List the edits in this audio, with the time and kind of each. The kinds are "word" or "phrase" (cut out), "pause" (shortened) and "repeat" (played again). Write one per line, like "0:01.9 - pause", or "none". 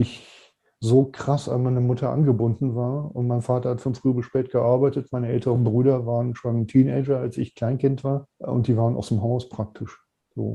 0:08.3 - pause